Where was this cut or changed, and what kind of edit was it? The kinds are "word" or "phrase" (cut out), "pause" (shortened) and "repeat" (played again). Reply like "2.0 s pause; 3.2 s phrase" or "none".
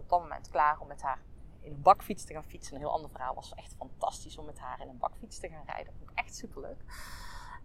none